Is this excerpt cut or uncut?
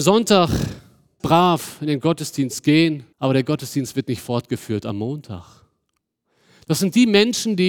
cut